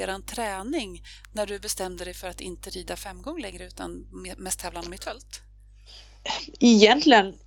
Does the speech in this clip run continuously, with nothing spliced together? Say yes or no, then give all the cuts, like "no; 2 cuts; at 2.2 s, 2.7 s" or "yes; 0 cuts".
yes; 0 cuts